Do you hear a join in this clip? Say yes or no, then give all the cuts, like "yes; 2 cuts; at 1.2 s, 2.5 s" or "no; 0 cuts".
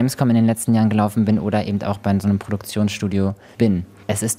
no; 0 cuts